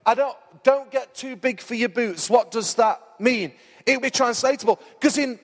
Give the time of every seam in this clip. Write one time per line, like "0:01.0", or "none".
0:04.0